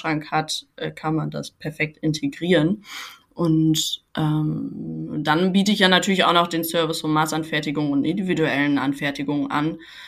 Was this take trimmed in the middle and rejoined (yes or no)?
yes